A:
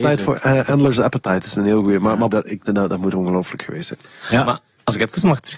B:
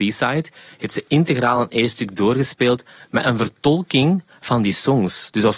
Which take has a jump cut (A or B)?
A